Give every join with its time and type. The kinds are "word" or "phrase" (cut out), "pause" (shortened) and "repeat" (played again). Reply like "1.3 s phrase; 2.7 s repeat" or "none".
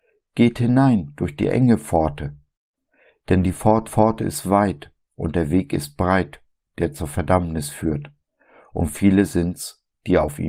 3.9 s repeat